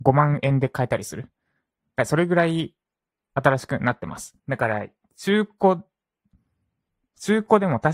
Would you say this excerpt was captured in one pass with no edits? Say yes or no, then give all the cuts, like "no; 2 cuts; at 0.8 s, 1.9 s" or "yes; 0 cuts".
no; 2 cuts; at 2.9 s, 4.4 s